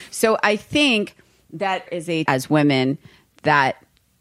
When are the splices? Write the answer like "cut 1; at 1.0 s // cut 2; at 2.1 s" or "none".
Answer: cut 1; at 1.9 s // cut 2; at 2.3 s